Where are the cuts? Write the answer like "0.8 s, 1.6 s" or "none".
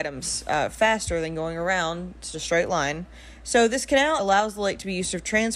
2.3 s, 4.2 s